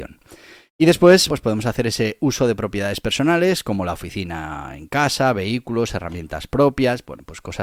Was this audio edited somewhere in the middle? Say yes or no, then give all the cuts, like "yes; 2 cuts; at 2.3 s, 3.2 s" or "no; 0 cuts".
yes; 1 cut; at 1.3 s